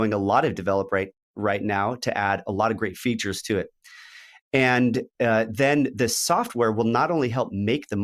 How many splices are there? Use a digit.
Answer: 0